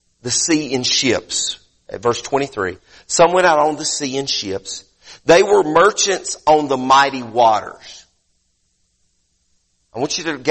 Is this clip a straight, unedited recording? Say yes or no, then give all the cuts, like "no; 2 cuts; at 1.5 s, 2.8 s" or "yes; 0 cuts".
yes; 0 cuts